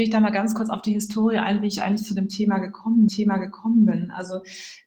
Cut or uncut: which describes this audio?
cut